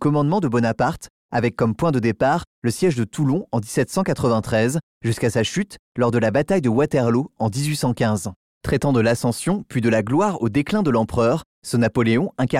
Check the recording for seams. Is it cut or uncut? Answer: uncut